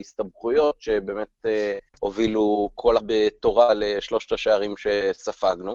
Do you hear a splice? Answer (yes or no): yes